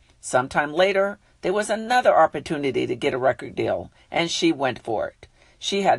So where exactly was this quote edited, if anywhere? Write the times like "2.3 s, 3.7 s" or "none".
none